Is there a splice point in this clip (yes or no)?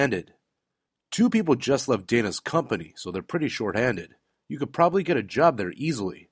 no